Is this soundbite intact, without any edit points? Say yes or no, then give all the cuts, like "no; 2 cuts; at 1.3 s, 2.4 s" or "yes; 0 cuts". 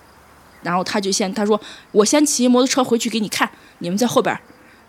yes; 0 cuts